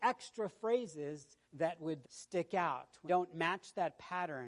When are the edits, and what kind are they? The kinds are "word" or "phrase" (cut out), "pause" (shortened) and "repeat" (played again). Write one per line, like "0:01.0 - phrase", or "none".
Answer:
0:01.4 - pause
0:02.0 - word
0:03.1 - word

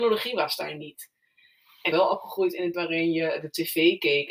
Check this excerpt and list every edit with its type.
0:01.9 - phrase
0:02.7 - word

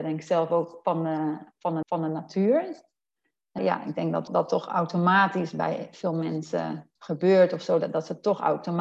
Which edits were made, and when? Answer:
0:01.8 - repeat
0:03.6 - word
0:04.3 - word
0:07.0 - pause

